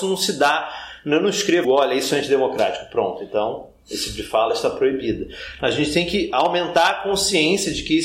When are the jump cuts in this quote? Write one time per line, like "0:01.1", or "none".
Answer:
0:01.6